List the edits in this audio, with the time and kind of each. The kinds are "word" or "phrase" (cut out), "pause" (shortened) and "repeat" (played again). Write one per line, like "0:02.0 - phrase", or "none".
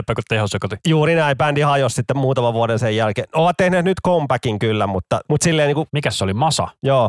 none